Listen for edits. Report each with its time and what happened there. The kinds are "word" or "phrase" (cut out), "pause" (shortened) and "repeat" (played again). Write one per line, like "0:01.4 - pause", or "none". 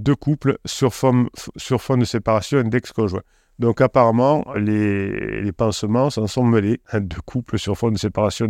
0:04.5 - word